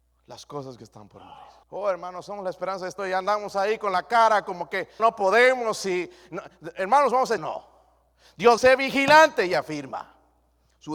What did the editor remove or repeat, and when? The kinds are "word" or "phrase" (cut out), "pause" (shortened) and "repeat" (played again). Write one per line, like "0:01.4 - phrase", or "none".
0:01.6 - pause
0:03.0 - word
0:05.0 - word
0:07.4 - phrase
0:08.6 - word